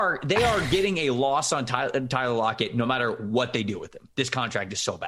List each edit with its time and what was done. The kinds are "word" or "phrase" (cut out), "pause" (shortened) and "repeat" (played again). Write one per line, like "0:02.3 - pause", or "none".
none